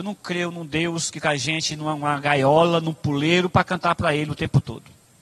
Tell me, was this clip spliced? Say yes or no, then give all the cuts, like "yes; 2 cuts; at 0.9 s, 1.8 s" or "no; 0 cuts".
yes; 1 cut; at 1.2 s